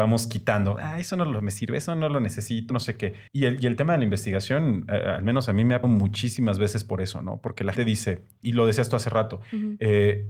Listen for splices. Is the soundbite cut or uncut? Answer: cut